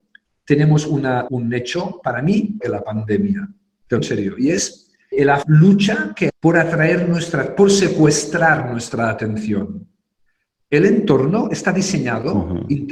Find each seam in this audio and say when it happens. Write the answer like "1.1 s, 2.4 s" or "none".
1.3 s, 2.6 s, 4.0 s, 5.1 s, 5.4 s, 6.3 s